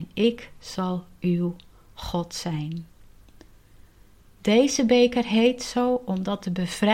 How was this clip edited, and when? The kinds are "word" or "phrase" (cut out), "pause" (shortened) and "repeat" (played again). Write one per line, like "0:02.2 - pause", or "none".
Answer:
none

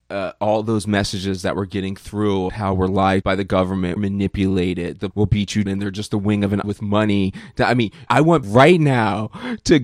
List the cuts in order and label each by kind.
0:02.5 - word
0:03.2 - word
0:04.0 - word
0:05.1 - word
0:05.7 - word
0:06.6 - word
0:08.1 - word
0:08.4 - word

